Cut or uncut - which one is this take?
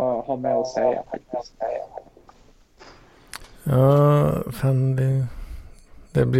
uncut